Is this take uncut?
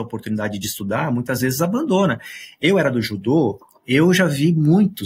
yes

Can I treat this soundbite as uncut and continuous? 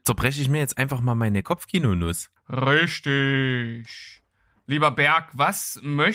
no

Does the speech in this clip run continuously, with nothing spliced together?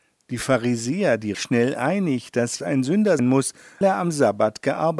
no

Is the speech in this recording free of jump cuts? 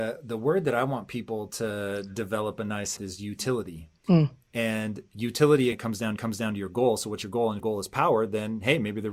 no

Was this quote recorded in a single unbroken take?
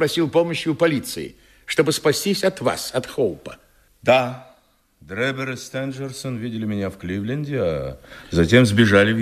yes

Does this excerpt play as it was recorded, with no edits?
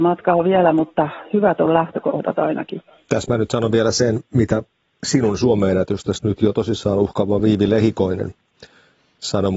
yes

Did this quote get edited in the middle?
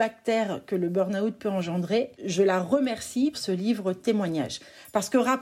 yes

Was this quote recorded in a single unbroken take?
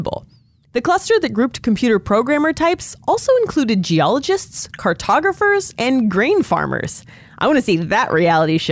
yes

